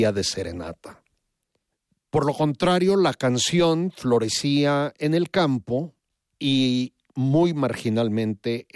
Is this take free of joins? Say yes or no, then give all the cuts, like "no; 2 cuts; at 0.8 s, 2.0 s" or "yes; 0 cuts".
yes; 0 cuts